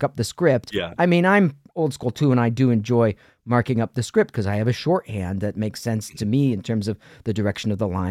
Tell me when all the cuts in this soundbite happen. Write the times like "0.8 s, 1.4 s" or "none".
none